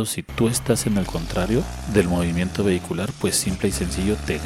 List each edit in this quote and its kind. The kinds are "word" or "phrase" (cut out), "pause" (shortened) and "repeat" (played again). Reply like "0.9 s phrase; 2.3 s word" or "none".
1.1 s word